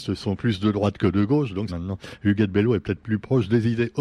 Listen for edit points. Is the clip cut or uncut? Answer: cut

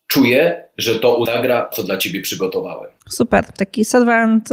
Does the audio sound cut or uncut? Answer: cut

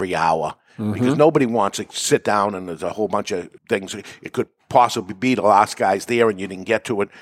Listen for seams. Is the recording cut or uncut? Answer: cut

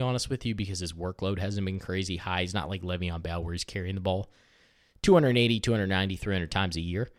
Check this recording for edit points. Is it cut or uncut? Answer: uncut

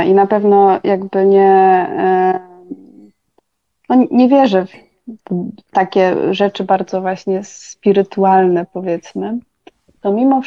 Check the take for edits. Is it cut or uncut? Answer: uncut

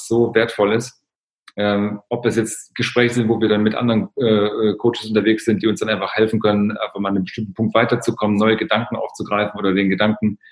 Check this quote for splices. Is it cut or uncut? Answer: uncut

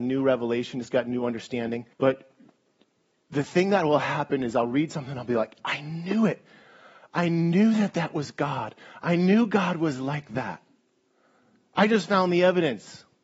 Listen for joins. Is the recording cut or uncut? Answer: cut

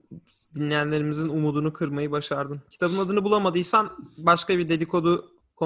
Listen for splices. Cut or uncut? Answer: uncut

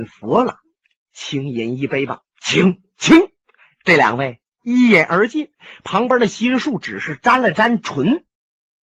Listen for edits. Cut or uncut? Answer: cut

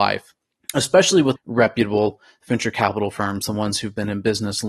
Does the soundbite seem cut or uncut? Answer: cut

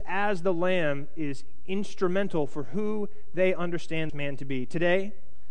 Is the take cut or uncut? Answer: cut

